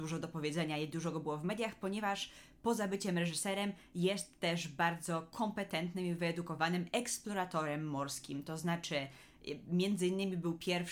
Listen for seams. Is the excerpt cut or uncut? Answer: uncut